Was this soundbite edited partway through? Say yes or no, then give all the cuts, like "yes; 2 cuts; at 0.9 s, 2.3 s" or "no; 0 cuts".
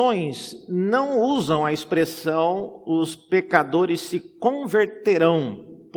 no; 0 cuts